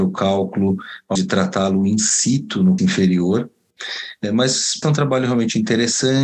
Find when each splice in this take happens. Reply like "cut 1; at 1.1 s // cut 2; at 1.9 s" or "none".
cut 1; at 1.2 s // cut 2; at 2.8 s // cut 3; at 4.8 s

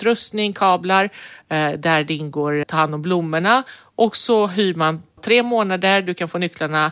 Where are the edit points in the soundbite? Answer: cut 1; at 2.6 s // cut 2; at 5.2 s

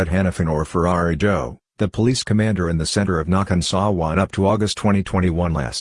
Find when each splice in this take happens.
none

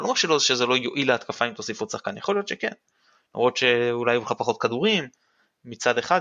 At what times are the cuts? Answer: none

